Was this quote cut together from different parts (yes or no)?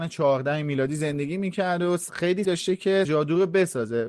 yes